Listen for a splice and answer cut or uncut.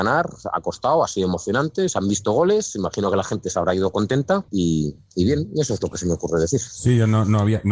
cut